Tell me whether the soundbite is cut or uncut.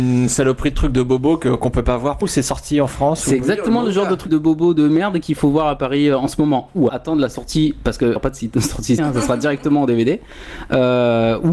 cut